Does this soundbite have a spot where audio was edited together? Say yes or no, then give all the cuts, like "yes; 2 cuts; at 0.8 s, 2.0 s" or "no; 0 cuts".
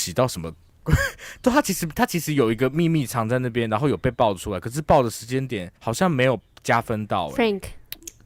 yes; 1 cut; at 5.8 s